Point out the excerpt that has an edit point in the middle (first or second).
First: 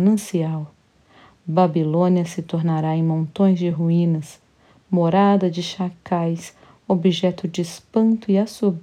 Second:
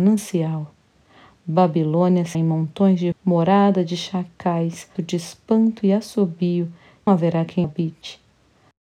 second